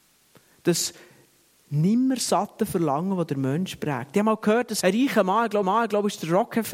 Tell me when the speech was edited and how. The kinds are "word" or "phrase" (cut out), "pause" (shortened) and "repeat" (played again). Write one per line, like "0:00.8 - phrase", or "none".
0:04.8 - word
0:05.6 - repeat